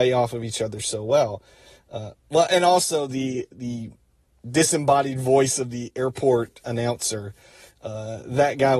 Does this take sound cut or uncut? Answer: uncut